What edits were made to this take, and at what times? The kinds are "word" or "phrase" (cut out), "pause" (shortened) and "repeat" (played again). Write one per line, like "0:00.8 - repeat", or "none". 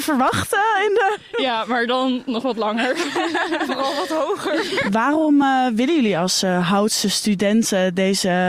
none